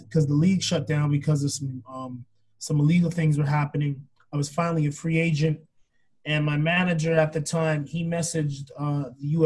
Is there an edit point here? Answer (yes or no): no